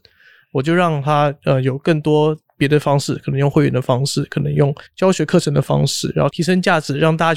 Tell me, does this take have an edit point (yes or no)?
yes